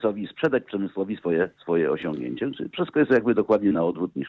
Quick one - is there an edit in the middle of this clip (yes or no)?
yes